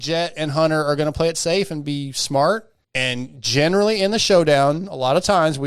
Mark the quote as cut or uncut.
cut